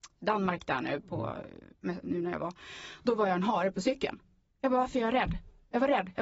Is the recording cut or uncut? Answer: uncut